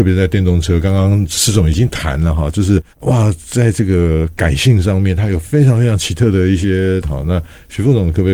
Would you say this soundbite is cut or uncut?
cut